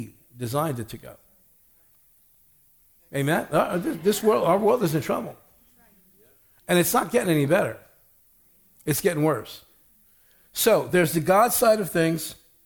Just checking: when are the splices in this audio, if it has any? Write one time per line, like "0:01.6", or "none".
none